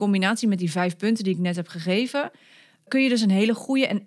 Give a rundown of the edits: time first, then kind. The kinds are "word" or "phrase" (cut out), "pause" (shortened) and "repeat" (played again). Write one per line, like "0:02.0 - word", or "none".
none